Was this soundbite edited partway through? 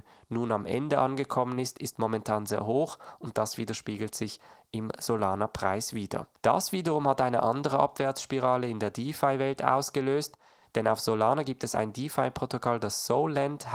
no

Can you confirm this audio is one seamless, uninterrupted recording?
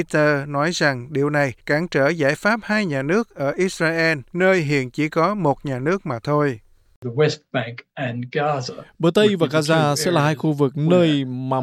no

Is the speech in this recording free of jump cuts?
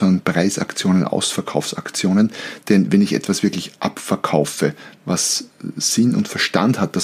yes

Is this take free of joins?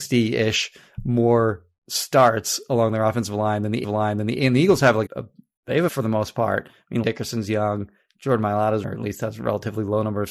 no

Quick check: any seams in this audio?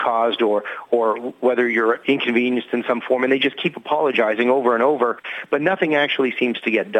no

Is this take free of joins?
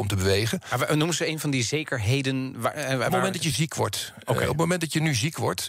yes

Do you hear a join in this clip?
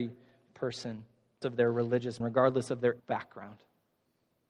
yes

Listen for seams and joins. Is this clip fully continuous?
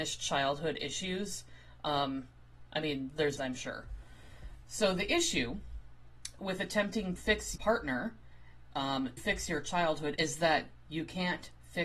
no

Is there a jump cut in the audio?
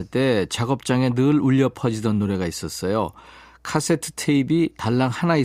no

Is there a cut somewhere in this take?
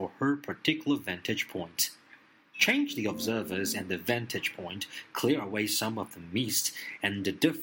no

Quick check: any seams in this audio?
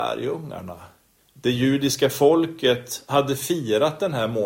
no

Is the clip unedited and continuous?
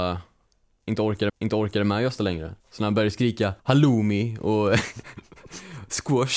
no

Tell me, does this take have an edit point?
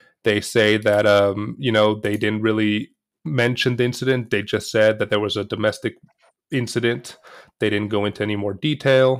no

